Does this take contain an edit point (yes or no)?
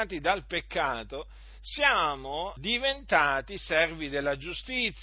yes